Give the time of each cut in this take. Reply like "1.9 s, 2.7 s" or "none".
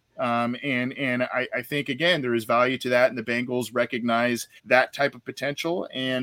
4.6 s

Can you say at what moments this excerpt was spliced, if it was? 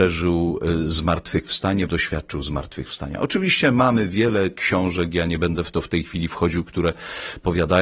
1.9 s

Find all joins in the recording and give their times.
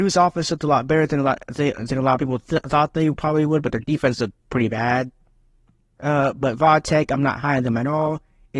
none

